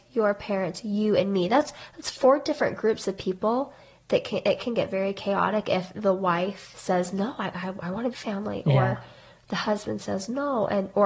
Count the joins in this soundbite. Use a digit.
1